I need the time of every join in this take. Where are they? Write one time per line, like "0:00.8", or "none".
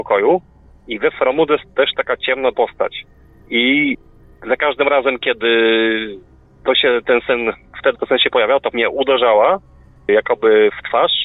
0:01.6
0:02.5
0:07.9
0:08.7